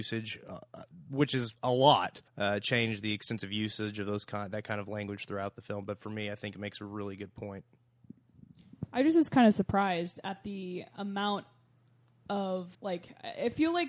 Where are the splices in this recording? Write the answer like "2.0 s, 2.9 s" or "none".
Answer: 1.6 s, 2.3 s, 12.7 s